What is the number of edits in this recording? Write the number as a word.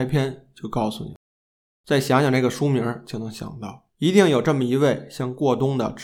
one